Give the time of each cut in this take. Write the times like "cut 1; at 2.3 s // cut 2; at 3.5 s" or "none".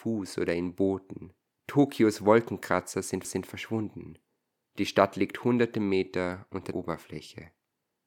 cut 1; at 1.5 s // cut 2; at 3.2 s // cut 3; at 6.7 s